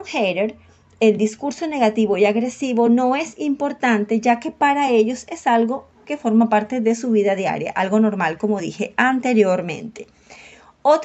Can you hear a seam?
no; 0 cuts

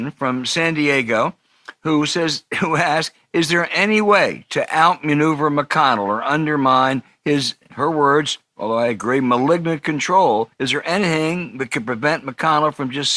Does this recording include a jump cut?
yes; 1 cut; at 10.5 s

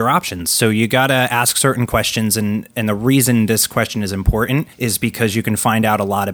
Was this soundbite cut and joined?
yes; 1 cut; at 4.7 s

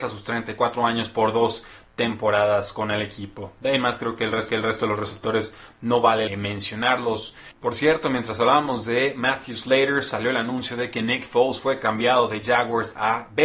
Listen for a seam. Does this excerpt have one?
yes; 2 cuts; at 4.5 s, 6.3 s

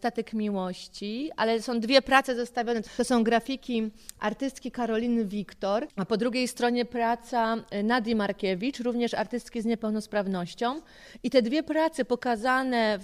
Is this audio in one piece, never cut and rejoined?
yes; 0 cuts

